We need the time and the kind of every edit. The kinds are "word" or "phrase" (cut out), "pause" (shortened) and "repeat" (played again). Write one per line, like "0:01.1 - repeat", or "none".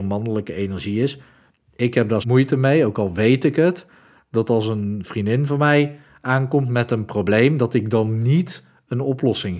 0:02.2 - word